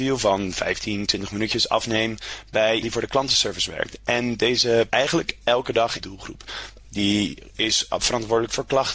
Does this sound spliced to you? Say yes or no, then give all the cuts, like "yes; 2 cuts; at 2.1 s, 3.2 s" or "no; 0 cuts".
yes; 3 cuts; at 2.8 s, 4.9 s, 6.0 s